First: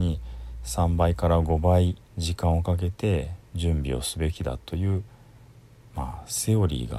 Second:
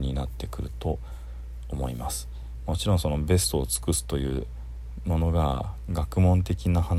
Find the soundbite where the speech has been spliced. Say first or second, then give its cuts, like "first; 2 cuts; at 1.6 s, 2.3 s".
first; 1 cut; at 2.1 s